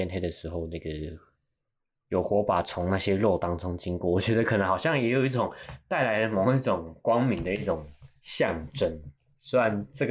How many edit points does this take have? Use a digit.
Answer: 0